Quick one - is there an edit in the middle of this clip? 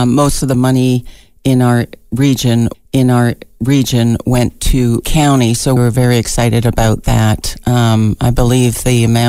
yes; 3 cuts; at 2.7 s, 5.0 s, 5.8 s

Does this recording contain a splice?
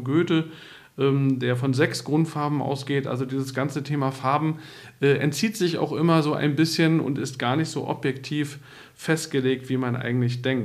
no; 0 cuts

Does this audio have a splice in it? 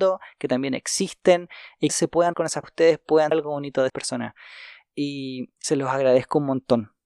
yes; 6 cuts; at 1.9 s, 2.3 s, 2.6 s, 3.3 s, 3.9 s, 5.6 s

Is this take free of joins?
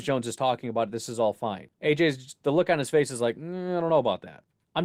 no; 1 cut; at 1.7 s

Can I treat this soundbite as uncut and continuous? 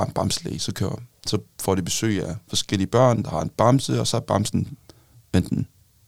yes; 0 cuts

